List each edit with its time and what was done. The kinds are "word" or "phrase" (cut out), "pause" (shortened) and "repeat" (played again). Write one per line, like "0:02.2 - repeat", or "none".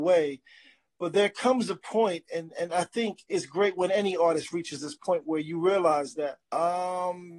0:06.4 - pause